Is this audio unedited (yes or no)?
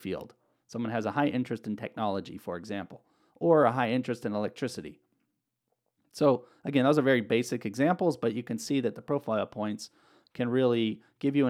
yes